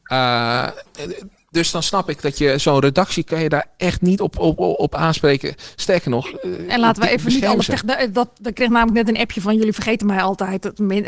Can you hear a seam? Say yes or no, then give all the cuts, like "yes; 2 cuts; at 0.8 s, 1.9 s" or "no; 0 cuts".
no; 0 cuts